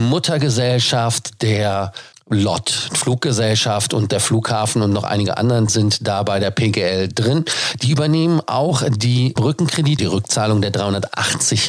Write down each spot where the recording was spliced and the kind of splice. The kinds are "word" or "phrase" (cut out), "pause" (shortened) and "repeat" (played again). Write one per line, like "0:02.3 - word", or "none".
0:02.1 - word
0:05.7 - word
0:09.4 - word
0:10.0 - word